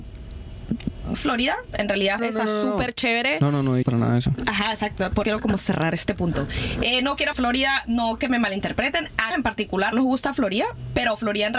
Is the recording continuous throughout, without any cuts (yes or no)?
no